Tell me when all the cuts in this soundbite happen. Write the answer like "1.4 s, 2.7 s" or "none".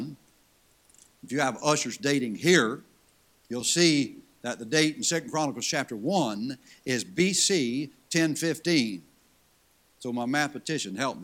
none